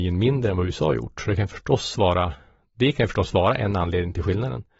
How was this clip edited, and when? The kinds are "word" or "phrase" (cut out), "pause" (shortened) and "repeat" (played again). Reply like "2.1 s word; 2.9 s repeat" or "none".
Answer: none